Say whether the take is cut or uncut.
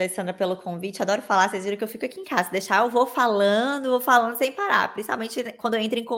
uncut